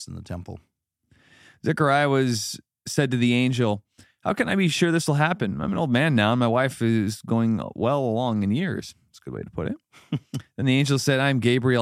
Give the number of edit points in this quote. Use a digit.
0